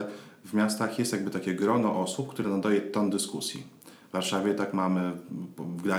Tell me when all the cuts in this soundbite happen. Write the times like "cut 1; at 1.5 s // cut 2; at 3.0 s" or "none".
none